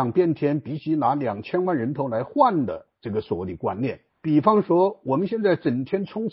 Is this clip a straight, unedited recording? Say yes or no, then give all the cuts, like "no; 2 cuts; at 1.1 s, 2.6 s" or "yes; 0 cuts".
no; 2 cuts; at 2.9 s, 4.1 s